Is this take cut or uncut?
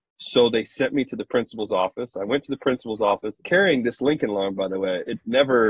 cut